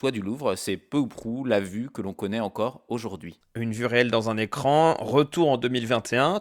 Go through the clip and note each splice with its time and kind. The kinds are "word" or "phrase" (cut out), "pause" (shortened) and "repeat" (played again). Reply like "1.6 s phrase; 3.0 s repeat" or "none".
none

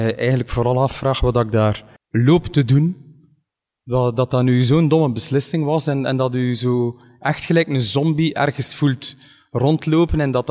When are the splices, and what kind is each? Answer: 2.0 s pause

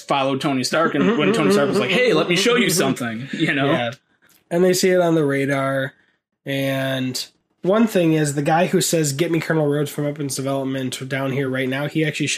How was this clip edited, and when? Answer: none

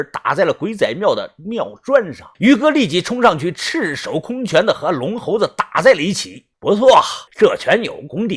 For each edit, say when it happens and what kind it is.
2.3 s pause; 6.5 s pause; 7.3 s pause

